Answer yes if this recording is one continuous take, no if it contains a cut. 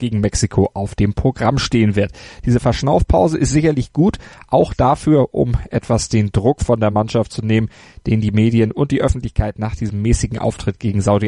yes